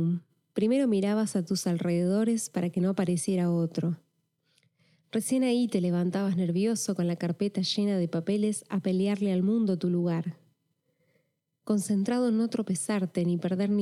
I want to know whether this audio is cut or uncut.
uncut